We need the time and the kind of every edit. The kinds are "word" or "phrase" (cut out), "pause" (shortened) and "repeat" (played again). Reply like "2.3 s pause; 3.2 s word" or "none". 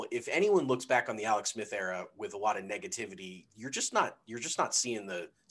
none